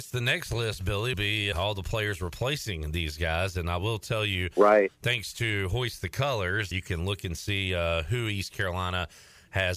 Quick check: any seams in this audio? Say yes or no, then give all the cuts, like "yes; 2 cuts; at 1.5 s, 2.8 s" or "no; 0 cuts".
yes; 3 cuts; at 1.1 s, 1.5 s, 6.7 s